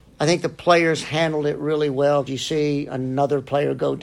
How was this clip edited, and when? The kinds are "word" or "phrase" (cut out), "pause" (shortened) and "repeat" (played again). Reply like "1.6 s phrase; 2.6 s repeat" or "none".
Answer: 2.3 s word